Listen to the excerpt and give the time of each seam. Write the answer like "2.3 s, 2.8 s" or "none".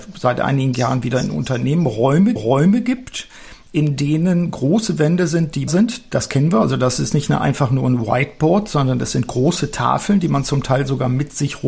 2.4 s, 5.7 s